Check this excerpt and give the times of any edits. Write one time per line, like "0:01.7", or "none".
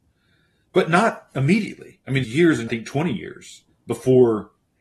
0:02.2
0:02.7
0:03.7